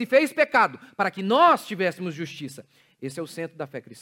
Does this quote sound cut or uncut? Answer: uncut